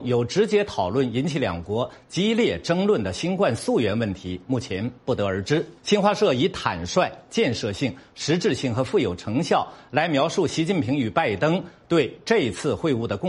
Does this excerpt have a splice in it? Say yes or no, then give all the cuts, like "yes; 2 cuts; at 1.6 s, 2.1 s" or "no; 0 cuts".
yes; 2 cuts; at 5.0 s, 5.8 s